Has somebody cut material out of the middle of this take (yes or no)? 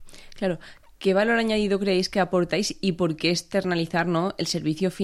no